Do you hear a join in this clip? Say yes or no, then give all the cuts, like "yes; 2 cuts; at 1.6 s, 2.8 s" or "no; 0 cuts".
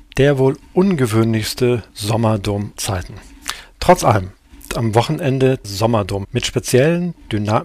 yes; 4 cuts; at 2.8 s, 4.7 s, 5.6 s, 6.2 s